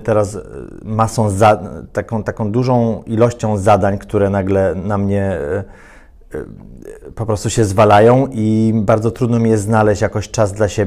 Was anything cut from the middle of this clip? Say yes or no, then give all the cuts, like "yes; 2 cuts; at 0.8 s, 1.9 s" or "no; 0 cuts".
no; 0 cuts